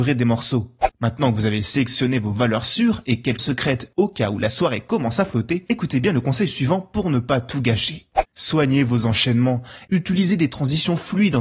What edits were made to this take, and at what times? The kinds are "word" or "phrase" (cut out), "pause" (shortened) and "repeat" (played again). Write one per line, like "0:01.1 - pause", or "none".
0:03.4 - word